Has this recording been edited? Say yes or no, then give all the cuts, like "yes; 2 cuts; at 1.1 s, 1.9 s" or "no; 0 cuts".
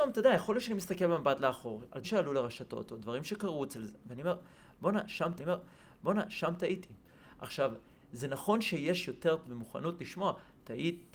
yes; 3 cuts; at 2.0 s, 5.4 s, 9.4 s